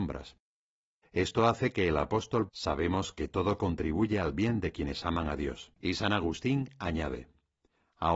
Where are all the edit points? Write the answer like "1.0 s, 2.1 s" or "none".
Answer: 2.5 s, 5.7 s

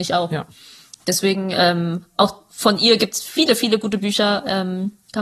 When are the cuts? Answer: 2.5 s

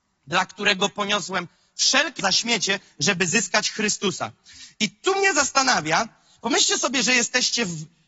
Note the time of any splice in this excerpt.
2.2 s

